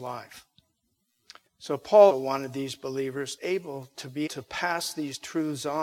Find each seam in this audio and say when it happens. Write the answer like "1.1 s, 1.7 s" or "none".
1.5 s, 2.1 s, 3.4 s, 4.3 s